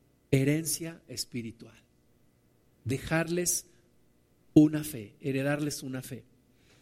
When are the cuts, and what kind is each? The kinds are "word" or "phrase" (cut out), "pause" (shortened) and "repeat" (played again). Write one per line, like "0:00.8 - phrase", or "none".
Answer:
none